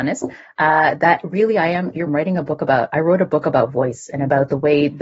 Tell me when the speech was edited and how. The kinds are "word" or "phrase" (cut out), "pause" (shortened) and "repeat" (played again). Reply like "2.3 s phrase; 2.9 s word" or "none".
2.1 s phrase